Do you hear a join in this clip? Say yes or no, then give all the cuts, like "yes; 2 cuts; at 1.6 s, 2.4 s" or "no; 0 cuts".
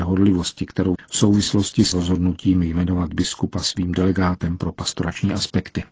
yes; 2 cuts; at 1.0 s, 1.9 s